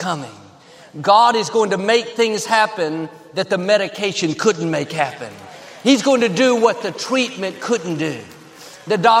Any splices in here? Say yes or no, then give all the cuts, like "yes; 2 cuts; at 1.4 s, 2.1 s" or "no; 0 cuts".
no; 0 cuts